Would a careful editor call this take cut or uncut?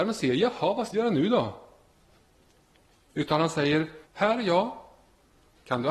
cut